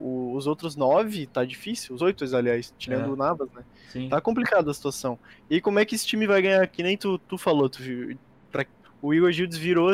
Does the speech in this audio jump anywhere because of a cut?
yes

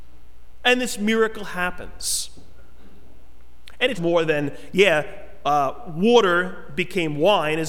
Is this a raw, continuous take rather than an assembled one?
no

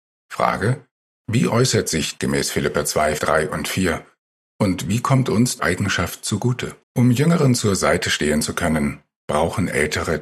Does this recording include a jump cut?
yes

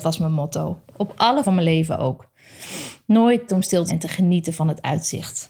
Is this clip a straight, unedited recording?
no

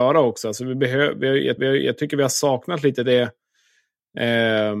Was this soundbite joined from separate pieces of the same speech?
yes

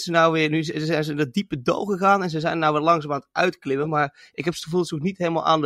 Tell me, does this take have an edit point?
no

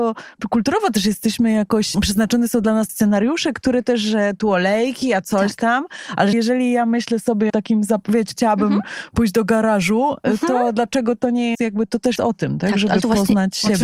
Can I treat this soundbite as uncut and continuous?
no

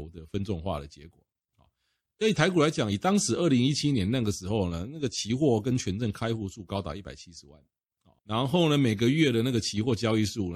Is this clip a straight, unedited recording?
no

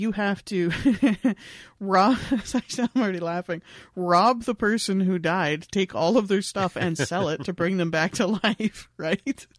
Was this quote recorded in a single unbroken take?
yes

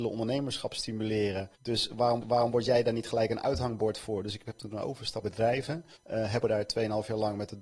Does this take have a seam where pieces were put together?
yes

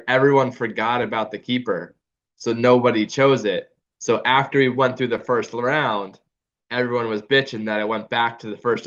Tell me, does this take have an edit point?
no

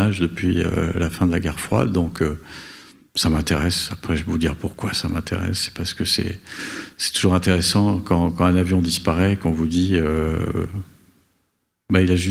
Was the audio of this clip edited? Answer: no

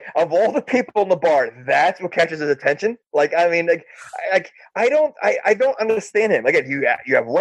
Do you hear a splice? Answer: no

